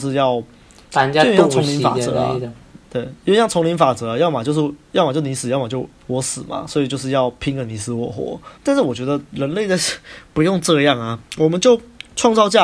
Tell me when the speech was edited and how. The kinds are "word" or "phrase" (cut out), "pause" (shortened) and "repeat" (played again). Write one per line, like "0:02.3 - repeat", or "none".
0:02.8 - pause
0:06.0 - pause
0:08.5 - pause
0:11.3 - pause